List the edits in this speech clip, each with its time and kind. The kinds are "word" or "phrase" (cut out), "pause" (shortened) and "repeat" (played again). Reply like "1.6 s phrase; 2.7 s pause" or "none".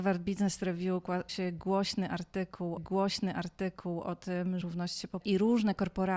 1.3 s word; 2.8 s repeat; 4.6 s word; 5.2 s phrase